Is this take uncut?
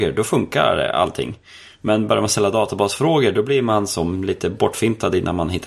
yes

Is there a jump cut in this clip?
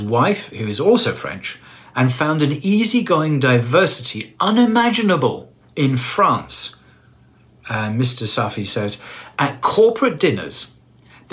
no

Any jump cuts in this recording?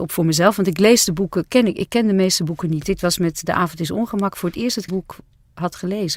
yes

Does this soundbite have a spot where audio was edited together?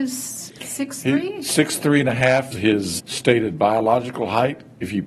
yes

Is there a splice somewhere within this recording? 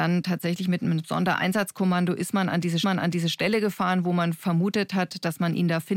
yes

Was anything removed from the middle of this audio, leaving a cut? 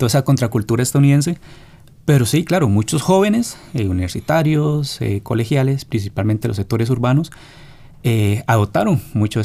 no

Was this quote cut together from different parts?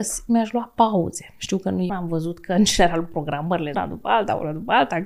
yes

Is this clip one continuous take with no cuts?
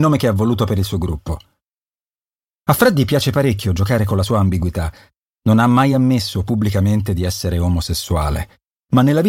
yes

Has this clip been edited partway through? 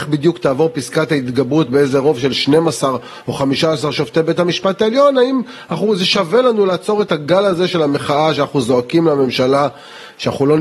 no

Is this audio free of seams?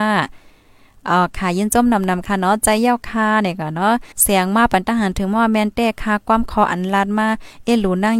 no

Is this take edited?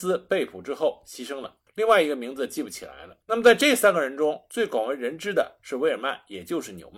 yes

